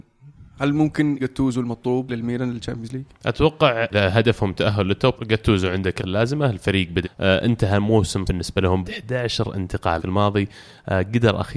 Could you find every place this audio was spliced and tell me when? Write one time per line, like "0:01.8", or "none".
0:01.2
0:02.1
0:03.9
0:05.1
0:06.0
0:07.0
0:08.2
0:08.8
0:10.0